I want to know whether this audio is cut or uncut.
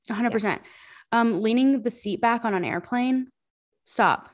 uncut